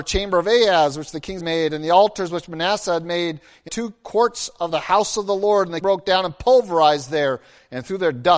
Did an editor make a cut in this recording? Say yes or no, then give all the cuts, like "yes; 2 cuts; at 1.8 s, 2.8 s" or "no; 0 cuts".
yes; 3 cuts; at 1.4 s, 3.7 s, 5.8 s